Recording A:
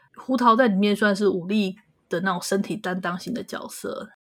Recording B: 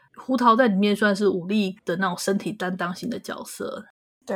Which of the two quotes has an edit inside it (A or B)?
B